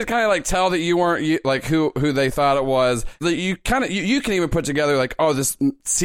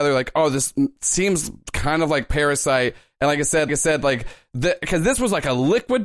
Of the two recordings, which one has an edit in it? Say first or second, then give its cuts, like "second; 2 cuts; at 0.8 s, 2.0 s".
second; 1 cut; at 3.7 s